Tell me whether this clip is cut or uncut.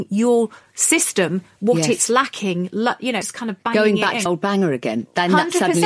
cut